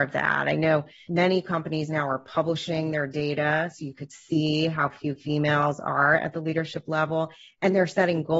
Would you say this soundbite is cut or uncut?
uncut